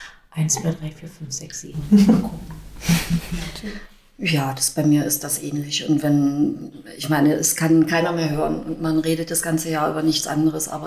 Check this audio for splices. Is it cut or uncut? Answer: uncut